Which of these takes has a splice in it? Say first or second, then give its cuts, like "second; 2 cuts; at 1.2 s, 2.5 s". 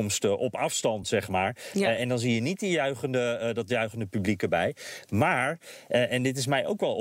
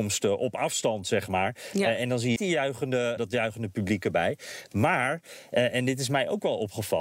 second; 2 cuts; at 2.4 s, 3.2 s